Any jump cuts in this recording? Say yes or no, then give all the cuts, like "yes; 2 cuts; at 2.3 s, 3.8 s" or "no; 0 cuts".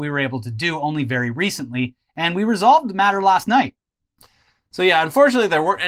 no; 0 cuts